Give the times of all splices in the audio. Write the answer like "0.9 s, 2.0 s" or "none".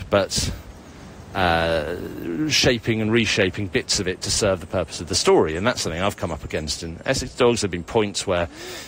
none